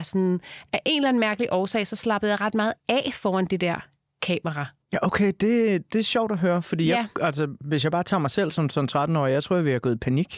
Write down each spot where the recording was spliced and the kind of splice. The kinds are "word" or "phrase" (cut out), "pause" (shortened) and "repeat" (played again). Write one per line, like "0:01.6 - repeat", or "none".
none